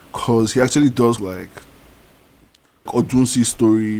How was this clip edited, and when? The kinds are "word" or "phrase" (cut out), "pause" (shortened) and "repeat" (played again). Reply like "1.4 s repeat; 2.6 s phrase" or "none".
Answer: 1.2 s word; 2.9 s word